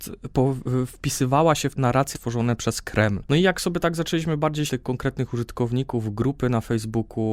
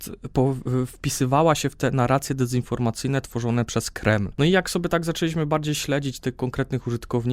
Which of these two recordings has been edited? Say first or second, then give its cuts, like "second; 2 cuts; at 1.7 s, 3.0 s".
first; 3 cuts; at 1.8 s, 2.1 s, 4.7 s